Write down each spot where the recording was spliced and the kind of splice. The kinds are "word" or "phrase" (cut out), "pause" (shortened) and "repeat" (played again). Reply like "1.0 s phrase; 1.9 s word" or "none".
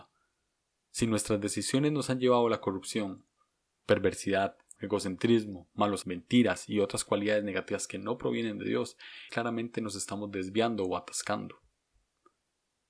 4.8 s word; 6.0 s word; 9.3 s word